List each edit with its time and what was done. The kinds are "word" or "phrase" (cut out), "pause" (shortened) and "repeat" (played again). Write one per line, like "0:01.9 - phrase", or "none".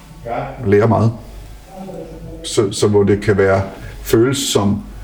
none